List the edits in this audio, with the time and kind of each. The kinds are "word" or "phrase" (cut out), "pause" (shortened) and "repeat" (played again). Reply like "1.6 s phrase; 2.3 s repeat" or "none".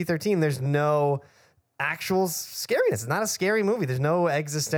none